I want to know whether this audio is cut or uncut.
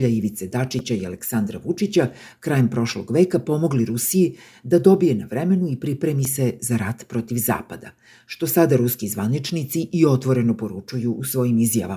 uncut